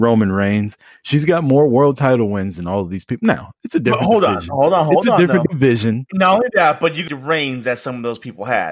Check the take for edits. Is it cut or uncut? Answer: cut